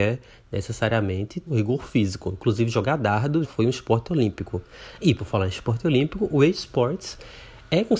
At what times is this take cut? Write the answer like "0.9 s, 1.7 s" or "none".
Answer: 1.5 s, 3.4 s